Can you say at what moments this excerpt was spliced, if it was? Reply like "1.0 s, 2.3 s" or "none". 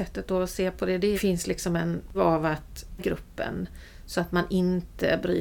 1.1 s, 2.1 s, 3.0 s

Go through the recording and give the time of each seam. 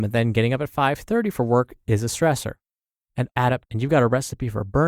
3.3 s, 3.6 s

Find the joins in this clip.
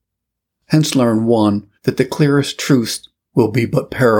1.7 s

